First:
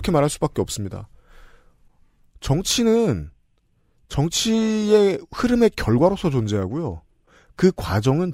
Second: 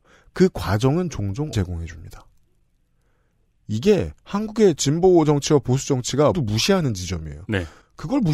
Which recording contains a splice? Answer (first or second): second